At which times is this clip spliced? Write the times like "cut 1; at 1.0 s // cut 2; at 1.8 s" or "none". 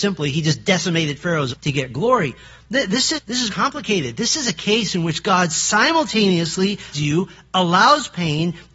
cut 1; at 1.5 s // cut 2; at 3.1 s // cut 3; at 3.5 s // cut 4; at 6.9 s